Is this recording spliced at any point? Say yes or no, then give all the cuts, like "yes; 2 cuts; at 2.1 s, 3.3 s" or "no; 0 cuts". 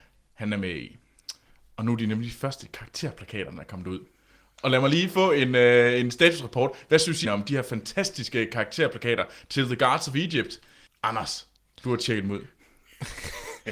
yes; 2 cuts; at 7.2 s, 10.9 s